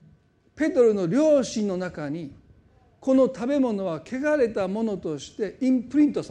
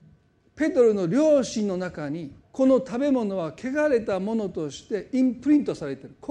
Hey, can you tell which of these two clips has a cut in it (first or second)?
second